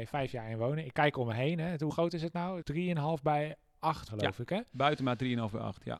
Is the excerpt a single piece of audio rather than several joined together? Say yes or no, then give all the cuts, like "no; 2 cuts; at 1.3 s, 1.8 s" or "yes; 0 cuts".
no; 3 cuts; at 1.9 s, 2.6 s, 4.1 s